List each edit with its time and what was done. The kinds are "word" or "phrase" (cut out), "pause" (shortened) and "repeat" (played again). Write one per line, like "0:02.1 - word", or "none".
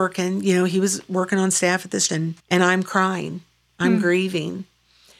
0:02.1 - word
0:02.4 - pause